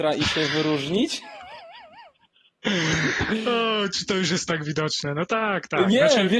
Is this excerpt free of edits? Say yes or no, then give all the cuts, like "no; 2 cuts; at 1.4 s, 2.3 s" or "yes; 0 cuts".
yes; 0 cuts